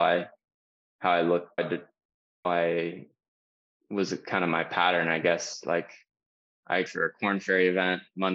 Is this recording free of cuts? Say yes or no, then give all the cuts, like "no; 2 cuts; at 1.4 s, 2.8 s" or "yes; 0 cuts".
no; 3 cuts; at 1.6 s, 2.4 s, 6.9 s